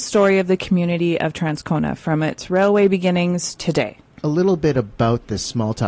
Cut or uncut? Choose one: cut